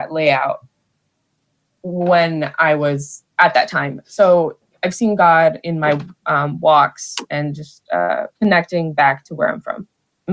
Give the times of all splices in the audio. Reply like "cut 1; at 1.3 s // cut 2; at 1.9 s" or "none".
cut 1; at 3.3 s // cut 2; at 8.4 s